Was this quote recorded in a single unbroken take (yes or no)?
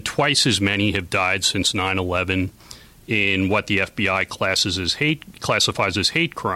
yes